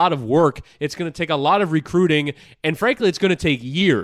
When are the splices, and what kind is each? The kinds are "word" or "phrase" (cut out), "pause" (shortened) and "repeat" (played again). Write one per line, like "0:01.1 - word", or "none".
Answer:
none